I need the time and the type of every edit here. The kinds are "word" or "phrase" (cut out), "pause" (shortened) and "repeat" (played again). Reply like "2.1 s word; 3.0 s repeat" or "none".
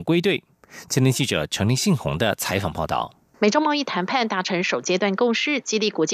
3.3 s pause